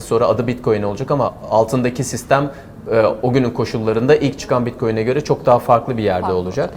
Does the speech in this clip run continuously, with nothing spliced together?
no; 1 cut; at 1.3 s

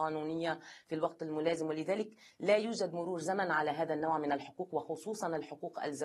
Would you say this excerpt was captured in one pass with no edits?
yes; 0 cuts

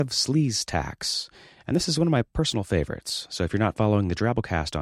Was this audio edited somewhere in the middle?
no; 0 cuts

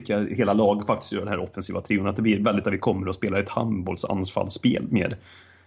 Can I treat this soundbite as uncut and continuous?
no; 1 cut; at 2.6 s

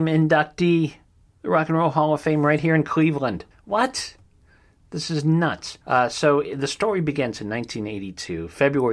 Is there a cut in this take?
yes; 3 cuts; at 1.0 s, 3.5 s, 5.8 s

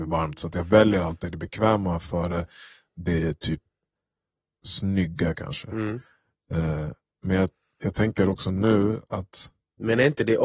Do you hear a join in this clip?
no; 0 cuts

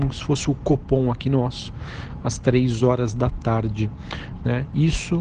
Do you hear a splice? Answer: no; 0 cuts

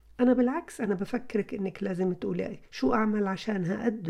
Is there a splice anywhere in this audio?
yes; 1 cut; at 2.7 s

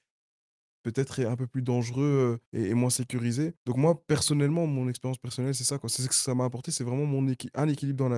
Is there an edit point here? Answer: yes; 2 cuts; at 2.5 s, 3.6 s

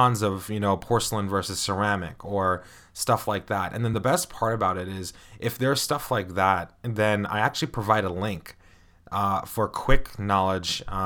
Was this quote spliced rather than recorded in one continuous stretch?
no; 0 cuts

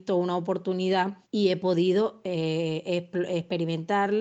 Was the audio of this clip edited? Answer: yes; 1 cut; at 1.2 s

